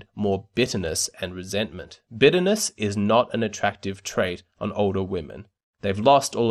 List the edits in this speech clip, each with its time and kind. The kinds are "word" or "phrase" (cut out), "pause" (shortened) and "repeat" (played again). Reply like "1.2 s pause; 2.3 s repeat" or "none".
none